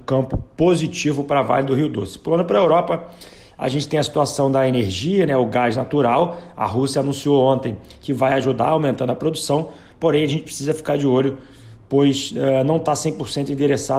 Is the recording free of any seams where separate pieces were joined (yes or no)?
yes